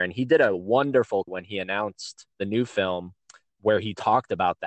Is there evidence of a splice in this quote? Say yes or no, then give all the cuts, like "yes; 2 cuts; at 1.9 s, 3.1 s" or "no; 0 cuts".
yes; 3 cuts; at 1.3 s, 2.3 s, 3.5 s